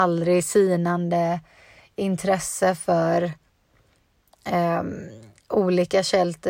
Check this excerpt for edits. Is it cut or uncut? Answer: uncut